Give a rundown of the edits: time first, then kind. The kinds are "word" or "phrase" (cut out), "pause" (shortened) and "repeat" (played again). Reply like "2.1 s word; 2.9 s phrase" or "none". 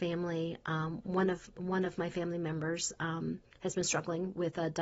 none